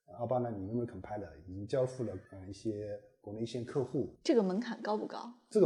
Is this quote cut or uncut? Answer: cut